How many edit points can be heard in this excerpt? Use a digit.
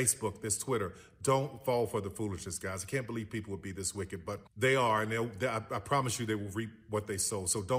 1